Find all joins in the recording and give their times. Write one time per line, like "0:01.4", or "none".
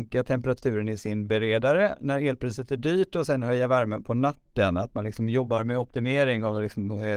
none